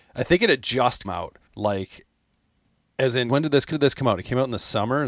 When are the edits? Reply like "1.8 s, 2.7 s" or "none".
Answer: 1.0 s, 1.5 s, 3.3 s, 3.7 s